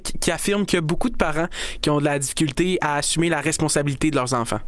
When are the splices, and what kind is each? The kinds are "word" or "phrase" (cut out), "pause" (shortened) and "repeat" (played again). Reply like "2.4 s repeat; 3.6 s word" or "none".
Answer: none